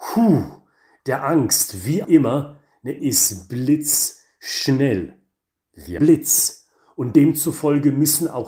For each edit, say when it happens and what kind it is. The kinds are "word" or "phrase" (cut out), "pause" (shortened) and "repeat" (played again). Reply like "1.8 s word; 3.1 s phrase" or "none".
1.0 s word; 2.0 s word; 3.0 s word; 6.0 s word